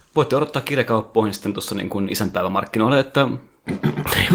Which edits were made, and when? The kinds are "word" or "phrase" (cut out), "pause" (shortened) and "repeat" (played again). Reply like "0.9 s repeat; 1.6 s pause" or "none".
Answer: none